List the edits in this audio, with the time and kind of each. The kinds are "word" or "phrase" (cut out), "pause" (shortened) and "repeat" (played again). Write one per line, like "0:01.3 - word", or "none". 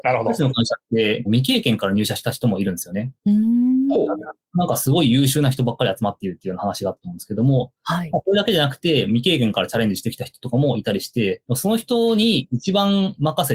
0:01.3 - phrase